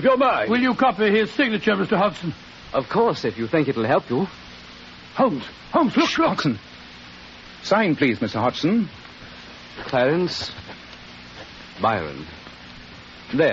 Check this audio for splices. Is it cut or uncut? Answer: uncut